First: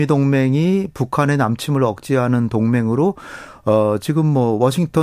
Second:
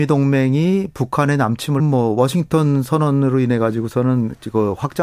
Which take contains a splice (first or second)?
second